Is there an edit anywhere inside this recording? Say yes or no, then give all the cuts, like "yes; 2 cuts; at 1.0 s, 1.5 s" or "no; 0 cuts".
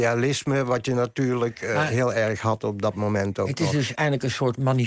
no; 0 cuts